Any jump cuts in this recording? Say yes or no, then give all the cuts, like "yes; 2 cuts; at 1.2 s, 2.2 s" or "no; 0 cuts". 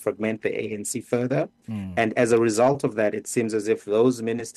no; 0 cuts